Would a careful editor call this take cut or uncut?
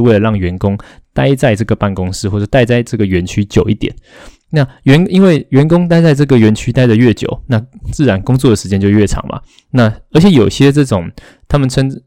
uncut